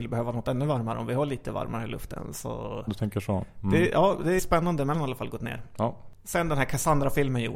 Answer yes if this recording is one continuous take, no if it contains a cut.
no